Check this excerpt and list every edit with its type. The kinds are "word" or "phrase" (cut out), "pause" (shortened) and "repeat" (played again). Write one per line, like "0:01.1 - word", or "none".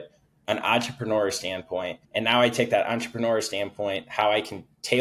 0:02.0 - pause